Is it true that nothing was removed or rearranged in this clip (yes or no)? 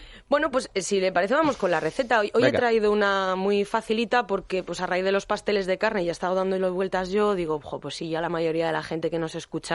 yes